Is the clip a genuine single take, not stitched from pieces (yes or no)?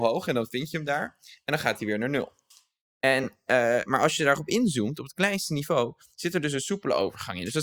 yes